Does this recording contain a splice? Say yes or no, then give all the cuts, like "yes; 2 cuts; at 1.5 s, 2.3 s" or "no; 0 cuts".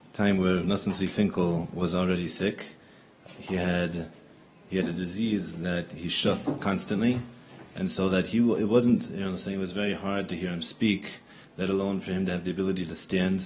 no; 0 cuts